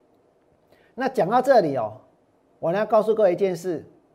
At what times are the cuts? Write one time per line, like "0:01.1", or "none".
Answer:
none